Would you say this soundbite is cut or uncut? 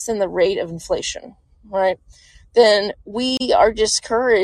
cut